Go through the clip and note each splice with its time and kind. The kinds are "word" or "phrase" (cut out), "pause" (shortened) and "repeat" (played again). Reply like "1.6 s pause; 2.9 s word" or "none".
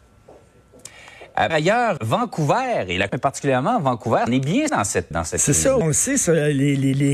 1.5 s word; 2.0 s word; 3.1 s word; 4.3 s word; 4.7 s word; 5.1 s word; 5.8 s word